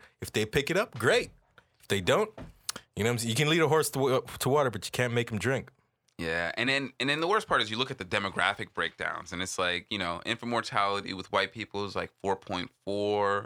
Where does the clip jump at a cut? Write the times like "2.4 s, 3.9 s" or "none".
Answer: none